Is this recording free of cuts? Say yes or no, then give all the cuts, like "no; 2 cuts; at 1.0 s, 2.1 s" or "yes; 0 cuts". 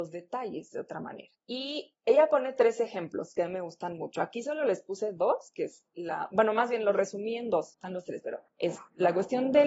yes; 0 cuts